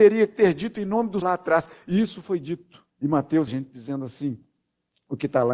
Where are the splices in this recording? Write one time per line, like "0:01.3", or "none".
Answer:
0:01.2
0:02.9
0:03.5